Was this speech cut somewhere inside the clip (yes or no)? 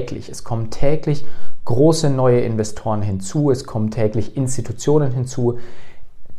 no